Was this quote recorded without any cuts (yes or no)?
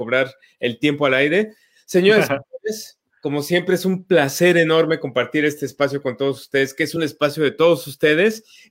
yes